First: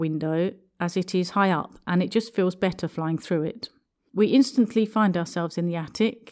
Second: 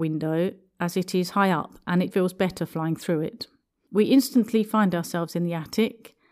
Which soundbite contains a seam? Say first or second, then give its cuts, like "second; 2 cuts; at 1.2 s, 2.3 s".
second; 1 cut; at 2.1 s